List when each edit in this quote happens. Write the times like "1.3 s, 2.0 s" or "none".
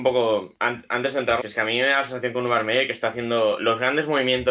1.4 s